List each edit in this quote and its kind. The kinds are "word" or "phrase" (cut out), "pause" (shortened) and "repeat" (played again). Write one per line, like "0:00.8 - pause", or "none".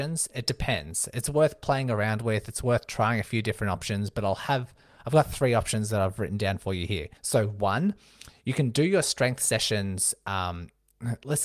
0:07.2 - pause